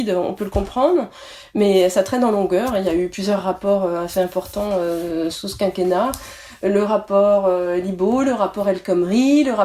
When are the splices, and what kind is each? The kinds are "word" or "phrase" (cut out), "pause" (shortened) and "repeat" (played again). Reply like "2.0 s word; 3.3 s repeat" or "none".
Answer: none